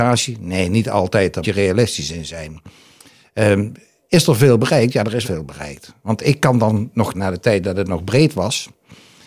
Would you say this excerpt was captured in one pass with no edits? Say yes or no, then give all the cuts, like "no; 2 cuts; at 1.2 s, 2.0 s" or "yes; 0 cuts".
no; 3 cuts; at 1.4 s, 5.2 s, 7.1 s